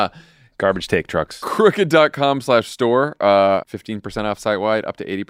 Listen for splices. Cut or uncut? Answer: cut